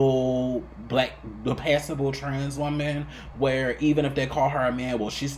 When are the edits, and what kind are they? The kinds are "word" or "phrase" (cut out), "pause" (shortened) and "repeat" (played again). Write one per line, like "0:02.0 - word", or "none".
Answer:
none